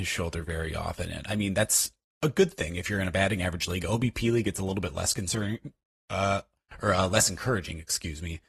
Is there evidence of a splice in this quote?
no; 0 cuts

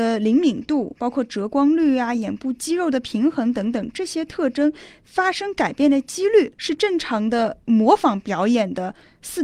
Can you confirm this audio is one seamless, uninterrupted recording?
no; 1 cut; at 6.5 s

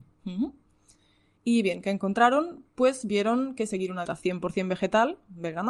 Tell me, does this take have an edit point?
yes; 1 cut; at 4.1 s

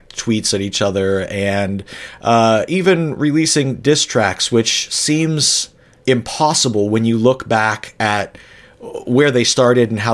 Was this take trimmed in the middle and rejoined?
no; 0 cuts

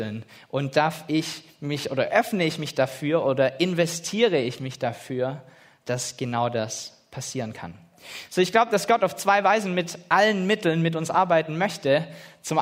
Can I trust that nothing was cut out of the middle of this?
yes; 0 cuts

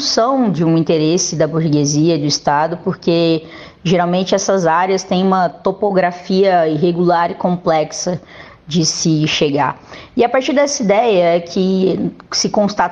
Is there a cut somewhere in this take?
no; 0 cuts

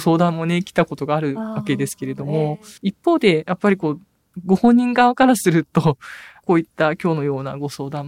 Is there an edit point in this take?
yes; 1 cut; at 2.8 s

